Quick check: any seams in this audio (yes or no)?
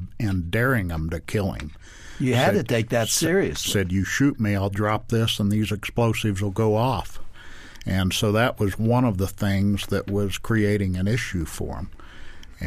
no